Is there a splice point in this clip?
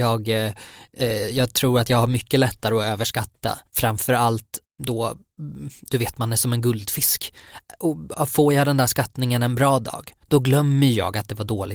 yes; 1 cut; at 3.7 s

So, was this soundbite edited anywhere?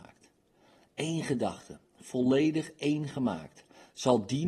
no; 0 cuts

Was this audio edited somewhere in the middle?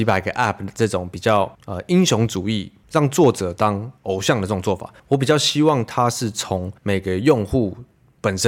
yes; 4 cuts; at 1.5 s, 4.0 s, 5.0 s, 6.8 s

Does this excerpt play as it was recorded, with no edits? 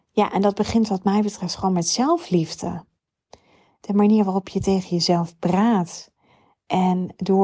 yes; 0 cuts

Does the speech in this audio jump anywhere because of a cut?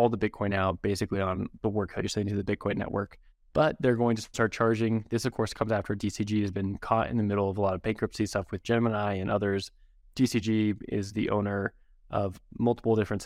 no; 0 cuts

